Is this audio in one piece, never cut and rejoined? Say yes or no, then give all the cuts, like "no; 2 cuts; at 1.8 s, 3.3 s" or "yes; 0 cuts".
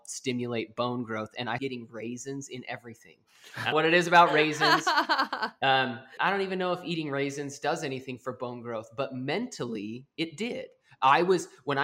no; 3 cuts; at 1.6 s, 3.7 s, 6.2 s